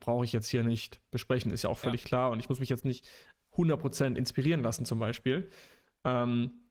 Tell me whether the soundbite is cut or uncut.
uncut